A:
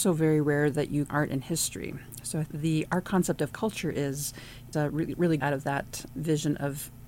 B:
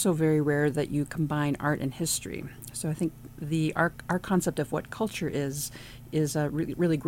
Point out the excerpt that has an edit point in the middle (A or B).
A